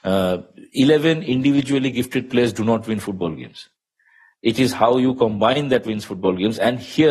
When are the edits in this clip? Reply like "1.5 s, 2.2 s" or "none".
none